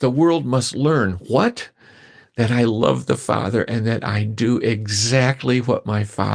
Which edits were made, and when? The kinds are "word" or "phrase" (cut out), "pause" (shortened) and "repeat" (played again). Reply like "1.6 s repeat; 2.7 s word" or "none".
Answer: none